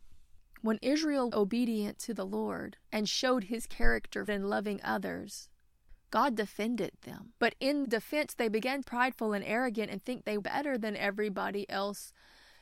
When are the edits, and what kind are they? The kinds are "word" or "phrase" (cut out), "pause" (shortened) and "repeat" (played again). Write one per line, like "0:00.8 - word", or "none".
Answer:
0:01.3 - word
0:02.8 - pause
0:04.3 - phrase
0:07.4 - pause
0:07.8 - word
0:08.8 - phrase
0:10.4 - word

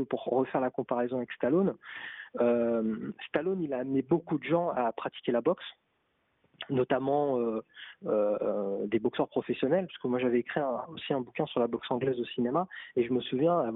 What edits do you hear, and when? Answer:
none

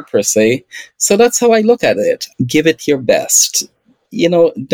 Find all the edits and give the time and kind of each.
none

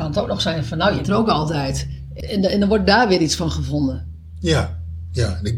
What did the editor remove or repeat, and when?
0:01.0 - word
0:02.2 - word

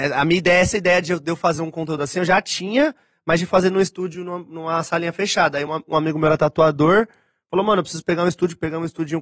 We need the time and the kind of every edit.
none

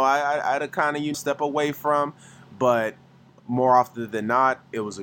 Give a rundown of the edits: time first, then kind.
0:01.1 - word

